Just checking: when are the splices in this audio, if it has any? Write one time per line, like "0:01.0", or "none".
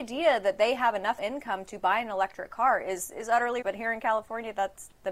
0:01.2
0:03.6